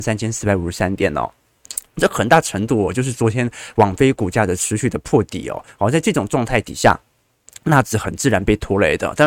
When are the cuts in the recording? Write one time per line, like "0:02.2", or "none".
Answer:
none